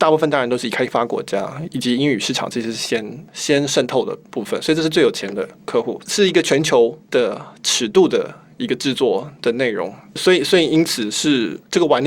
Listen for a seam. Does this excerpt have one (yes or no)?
no